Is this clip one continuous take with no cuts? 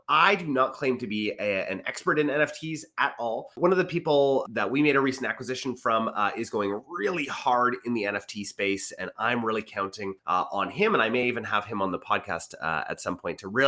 yes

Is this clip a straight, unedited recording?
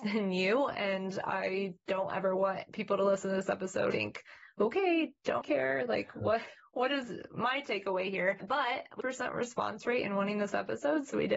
no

